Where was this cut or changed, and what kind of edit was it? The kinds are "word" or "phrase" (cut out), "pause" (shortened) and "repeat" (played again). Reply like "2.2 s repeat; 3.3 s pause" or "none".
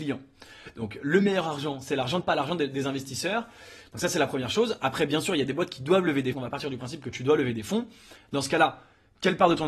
2.2 s phrase; 6.3 s phrase